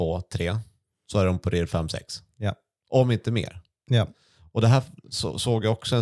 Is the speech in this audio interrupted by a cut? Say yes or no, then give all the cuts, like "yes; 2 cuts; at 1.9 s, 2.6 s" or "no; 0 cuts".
no; 0 cuts